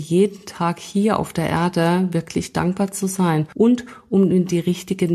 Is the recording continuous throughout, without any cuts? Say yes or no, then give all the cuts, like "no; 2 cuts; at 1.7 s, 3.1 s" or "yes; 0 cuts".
yes; 0 cuts